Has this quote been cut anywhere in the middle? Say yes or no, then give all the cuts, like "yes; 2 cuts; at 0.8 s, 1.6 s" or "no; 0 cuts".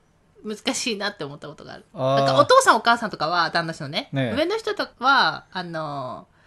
yes; 2 cuts; at 1.9 s, 4.9 s